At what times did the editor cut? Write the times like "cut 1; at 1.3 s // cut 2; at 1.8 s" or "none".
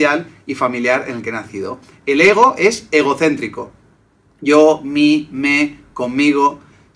none